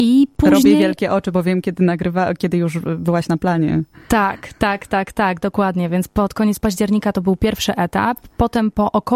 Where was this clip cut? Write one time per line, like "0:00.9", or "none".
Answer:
none